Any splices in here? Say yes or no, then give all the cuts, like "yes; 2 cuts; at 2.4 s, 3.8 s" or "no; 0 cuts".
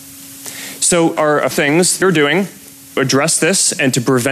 yes; 4 cuts; at 1.2 s, 1.5 s, 2.0 s, 3.0 s